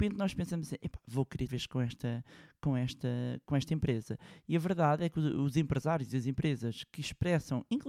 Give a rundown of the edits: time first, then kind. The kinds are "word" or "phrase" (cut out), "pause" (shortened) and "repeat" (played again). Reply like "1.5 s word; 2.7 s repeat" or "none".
1.5 s phrase

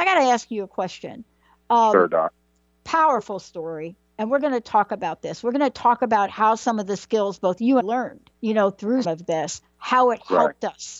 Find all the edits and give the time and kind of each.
7.8 s phrase; 8.3 s pause; 9.0 s word

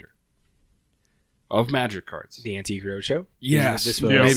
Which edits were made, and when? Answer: 3.3 s pause

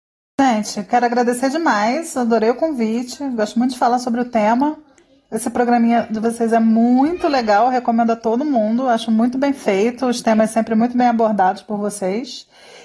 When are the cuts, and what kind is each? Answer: none

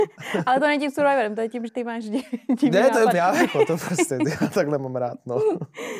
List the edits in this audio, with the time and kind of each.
1.7 s word; 3.1 s phrase

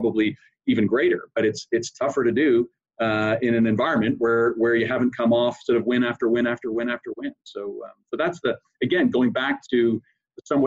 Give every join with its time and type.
none

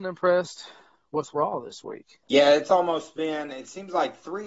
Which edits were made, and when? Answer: 2.2 s pause

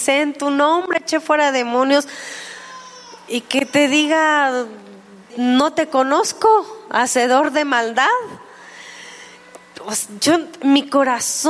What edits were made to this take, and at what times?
5.3 s word

